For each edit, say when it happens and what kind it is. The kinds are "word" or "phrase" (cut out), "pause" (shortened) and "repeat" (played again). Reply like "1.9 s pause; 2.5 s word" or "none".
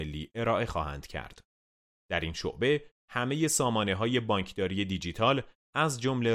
none